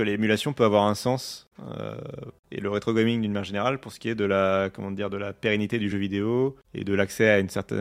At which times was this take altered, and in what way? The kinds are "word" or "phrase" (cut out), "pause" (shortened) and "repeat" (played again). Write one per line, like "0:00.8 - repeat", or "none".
none